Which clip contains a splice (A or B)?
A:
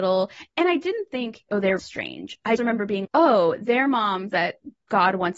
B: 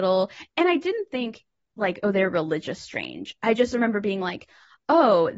A